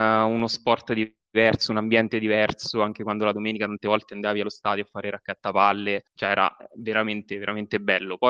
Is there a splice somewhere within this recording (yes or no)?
yes